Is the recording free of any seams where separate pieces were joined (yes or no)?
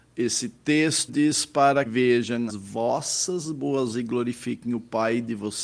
no